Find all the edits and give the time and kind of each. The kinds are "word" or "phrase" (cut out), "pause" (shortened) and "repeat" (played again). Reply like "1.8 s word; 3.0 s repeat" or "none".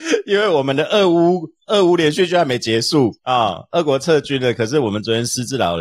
3.2 s pause